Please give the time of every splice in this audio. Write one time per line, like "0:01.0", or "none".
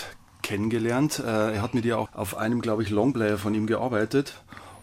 0:02.1